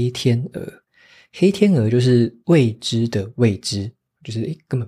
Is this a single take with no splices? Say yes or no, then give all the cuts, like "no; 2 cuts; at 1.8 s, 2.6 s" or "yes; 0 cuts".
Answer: yes; 0 cuts